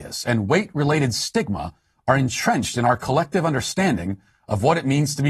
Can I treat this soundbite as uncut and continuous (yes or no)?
yes